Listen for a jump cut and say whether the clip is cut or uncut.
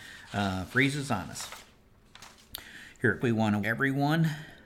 cut